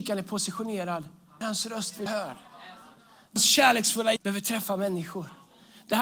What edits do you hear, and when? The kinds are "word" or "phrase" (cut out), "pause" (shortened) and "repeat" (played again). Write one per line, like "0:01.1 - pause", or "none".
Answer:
0:01.4 - word
0:02.1 - word
0:03.4 - word
0:04.2 - word